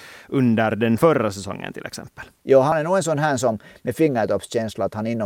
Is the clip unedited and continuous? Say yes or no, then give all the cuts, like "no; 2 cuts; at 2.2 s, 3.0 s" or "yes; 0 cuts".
yes; 0 cuts